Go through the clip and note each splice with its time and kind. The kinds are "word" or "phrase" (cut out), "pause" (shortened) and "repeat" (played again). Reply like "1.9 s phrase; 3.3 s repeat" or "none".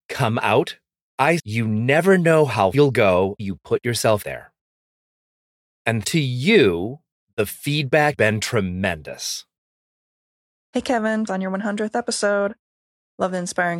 1.4 s word; 2.7 s word; 3.4 s word; 4.2 s word; 6.0 s word; 8.1 s word; 11.3 s word